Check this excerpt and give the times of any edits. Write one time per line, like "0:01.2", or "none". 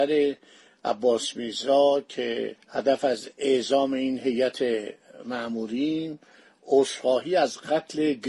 0:02.6